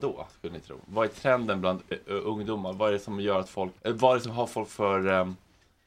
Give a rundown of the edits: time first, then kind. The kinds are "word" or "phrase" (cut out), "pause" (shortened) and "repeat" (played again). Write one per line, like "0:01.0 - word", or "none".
0:01.9 - word
0:03.8 - pause